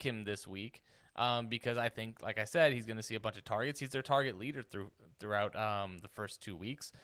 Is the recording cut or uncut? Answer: uncut